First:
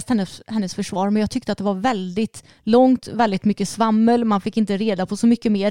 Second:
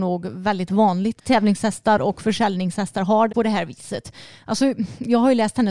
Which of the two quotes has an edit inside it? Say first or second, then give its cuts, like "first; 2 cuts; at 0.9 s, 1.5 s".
second; 2 cuts; at 1.2 s, 3.3 s